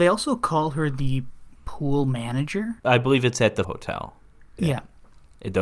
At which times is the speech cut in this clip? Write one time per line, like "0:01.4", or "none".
0:01.6
0:02.8
0:03.6
0:04.6